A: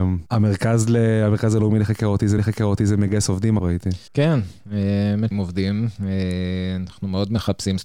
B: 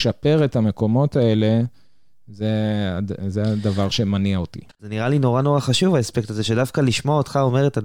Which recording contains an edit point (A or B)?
A